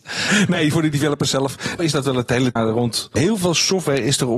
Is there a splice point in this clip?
yes; 2 cuts; at 1.8 s, 2.6 s

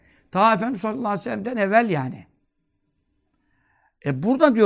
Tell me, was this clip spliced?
no; 0 cuts

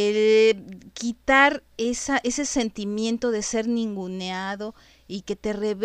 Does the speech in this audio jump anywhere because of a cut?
no; 0 cuts

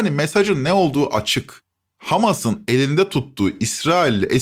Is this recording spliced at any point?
no; 0 cuts

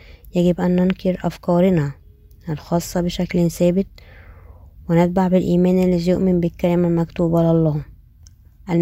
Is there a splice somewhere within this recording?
no; 0 cuts

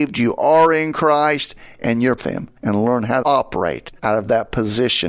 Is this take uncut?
no; 4 cuts; at 2.2 s, 2.6 s, 3.2 s, 4.0 s

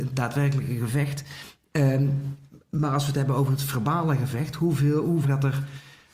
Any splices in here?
yes; 1 cut; at 5.2 s

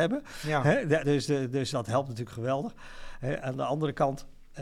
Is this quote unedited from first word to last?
no; 2 cuts; at 1.0 s, 1.7 s

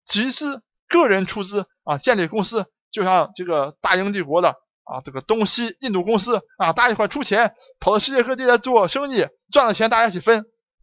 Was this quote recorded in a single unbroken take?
yes; 0 cuts

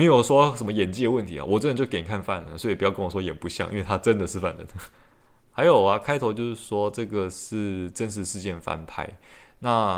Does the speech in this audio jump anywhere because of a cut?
yes; 1 cut; at 4.9 s

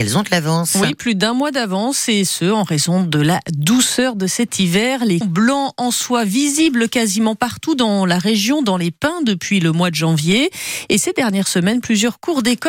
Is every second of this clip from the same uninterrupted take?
no; 1 cut; at 5.2 s

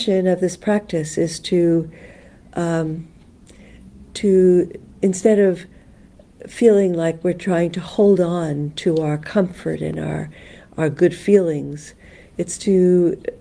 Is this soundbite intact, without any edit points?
yes; 0 cuts

